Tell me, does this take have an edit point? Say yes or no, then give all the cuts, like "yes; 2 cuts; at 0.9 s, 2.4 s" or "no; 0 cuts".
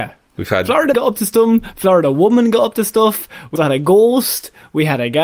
yes; 2 cuts; at 0.9 s, 3.6 s